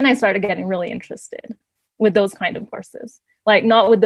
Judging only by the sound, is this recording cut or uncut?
uncut